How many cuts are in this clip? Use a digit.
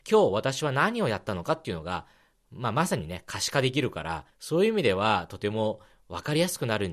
1